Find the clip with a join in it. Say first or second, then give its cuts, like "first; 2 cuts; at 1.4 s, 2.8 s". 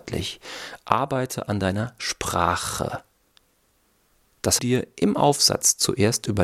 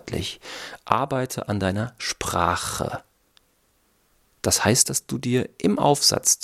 first; 1 cut; at 4.6 s